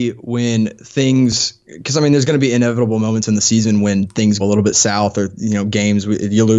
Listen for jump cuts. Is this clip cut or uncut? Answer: cut